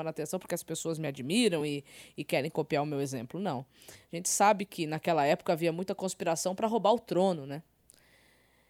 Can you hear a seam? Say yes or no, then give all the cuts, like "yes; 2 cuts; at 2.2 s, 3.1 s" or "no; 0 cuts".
no; 0 cuts